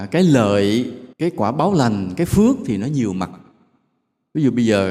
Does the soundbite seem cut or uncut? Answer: cut